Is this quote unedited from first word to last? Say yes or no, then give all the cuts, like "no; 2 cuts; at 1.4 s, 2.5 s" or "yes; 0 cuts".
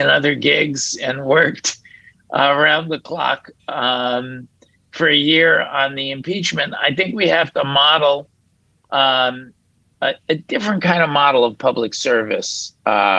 yes; 0 cuts